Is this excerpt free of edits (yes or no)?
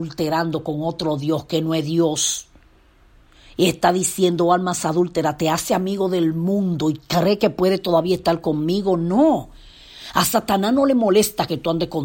yes